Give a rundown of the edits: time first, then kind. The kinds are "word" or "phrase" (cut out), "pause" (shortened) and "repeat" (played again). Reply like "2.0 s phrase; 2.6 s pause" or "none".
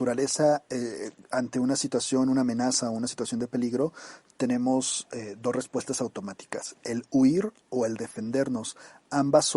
none

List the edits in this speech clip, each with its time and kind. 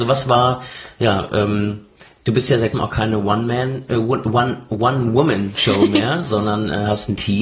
1.3 s word; 2.7 s word

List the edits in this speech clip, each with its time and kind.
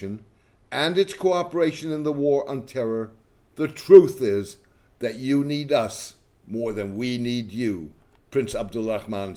none

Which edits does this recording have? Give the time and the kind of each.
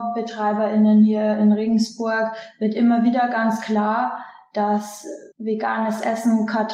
5.3 s pause

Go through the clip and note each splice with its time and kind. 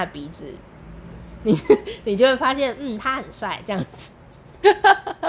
none

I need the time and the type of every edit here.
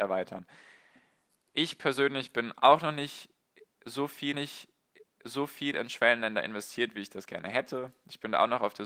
4.3 s repeat

